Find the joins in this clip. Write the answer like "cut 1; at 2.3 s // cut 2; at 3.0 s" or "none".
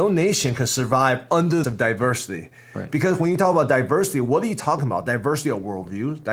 cut 1; at 1.6 s